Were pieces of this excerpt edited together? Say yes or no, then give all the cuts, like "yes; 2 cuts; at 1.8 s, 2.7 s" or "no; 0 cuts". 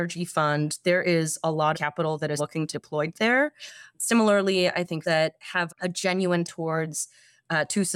yes; 6 cuts; at 1.7 s, 2.4 s, 2.7 s, 5.0 s, 5.7 s, 6.4 s